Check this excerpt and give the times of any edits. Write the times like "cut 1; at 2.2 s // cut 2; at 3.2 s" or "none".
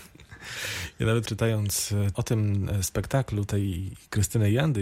cut 1; at 1.3 s // cut 2; at 2.1 s